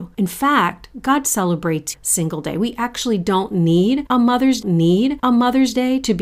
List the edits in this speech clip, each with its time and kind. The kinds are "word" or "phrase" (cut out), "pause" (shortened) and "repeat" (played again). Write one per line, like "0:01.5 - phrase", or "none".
0:01.9 - phrase
0:04.6 - repeat